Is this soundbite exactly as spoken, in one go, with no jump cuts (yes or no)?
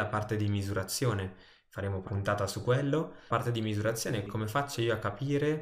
no